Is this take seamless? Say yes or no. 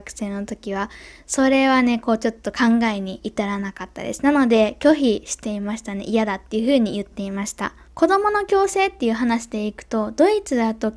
no